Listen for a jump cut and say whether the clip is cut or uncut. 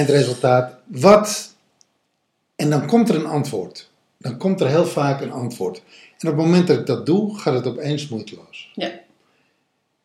uncut